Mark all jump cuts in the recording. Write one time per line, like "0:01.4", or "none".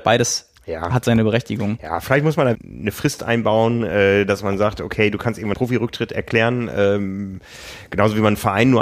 0:02.5
0:05.5